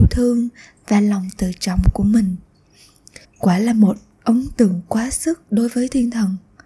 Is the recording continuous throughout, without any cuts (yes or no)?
no